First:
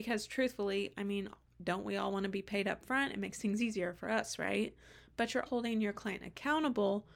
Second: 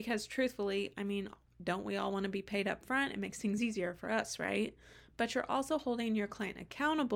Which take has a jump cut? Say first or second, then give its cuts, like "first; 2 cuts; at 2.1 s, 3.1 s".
first; 1 cut; at 5.5 s